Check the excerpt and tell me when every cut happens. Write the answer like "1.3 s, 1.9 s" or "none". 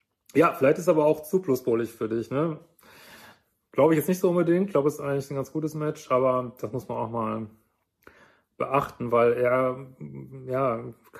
none

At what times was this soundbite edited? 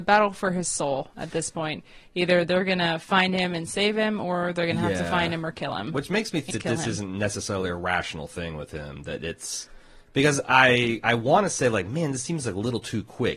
6.5 s

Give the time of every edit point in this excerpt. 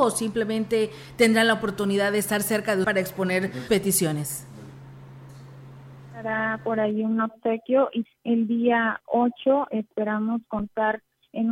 2.8 s, 3.7 s, 8.1 s

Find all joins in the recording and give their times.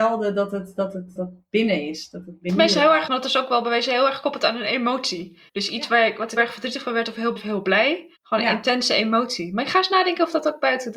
1.2 s, 2.5 s, 3.1 s, 5.5 s, 6.4 s, 7.4 s, 8.2 s

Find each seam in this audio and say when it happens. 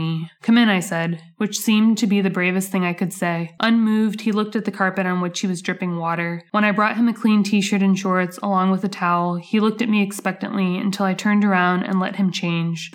none

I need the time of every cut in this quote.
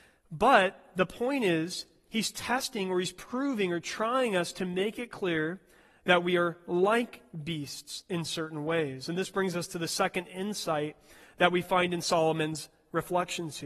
none

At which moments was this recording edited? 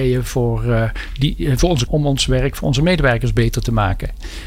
1.9 s

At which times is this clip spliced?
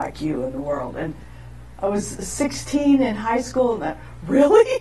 none

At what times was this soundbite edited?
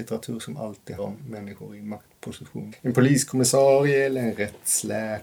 1.0 s, 2.7 s

